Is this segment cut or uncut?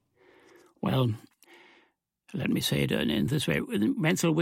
uncut